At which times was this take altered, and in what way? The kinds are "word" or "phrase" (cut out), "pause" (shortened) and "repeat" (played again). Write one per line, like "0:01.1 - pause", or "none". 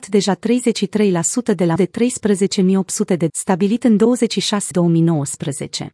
0:01.8 - word
0:03.3 - word
0:04.7 - word

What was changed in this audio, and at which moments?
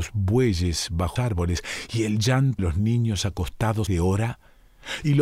0:01.2 - word
0:02.6 - word
0:03.9 - word

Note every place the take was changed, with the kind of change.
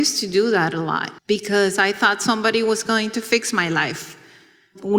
0:01.2 - pause

